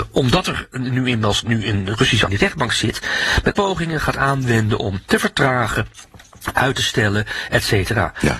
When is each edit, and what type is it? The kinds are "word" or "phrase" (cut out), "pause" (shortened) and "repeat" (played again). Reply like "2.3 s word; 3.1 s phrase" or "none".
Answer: 2.3 s phrase; 3.5 s word